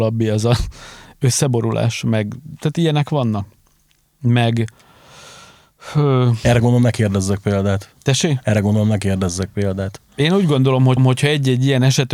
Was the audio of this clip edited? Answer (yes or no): yes